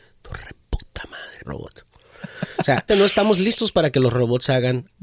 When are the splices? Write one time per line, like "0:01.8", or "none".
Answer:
0:01.4
0:02.9